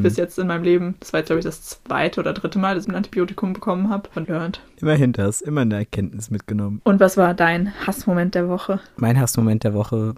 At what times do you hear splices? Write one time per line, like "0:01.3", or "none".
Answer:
0:02.8
0:04.2

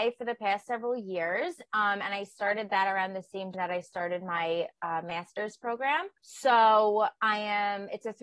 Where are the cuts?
0:03.5
0:06.2

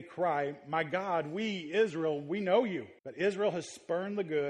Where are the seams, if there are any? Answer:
0:03.0

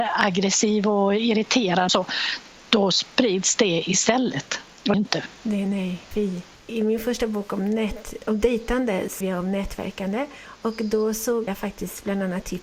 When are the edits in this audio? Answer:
0:01.9
0:04.9
0:05.4
0:06.1
0:08.2
0:09.2
0:11.5

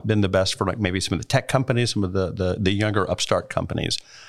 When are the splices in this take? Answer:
none

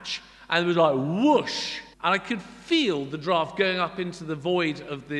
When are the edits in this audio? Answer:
0:01.9

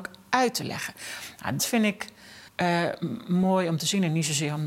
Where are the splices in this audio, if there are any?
0:01.6
0:02.5

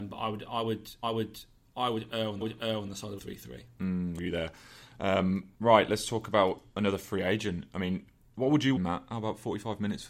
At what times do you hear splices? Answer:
0:01.0
0:02.4
0:03.2
0:04.2
0:05.5
0:08.2
0:08.8

